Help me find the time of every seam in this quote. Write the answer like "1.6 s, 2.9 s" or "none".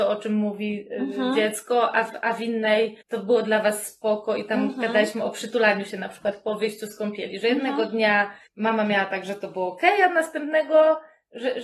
3.0 s, 8.5 s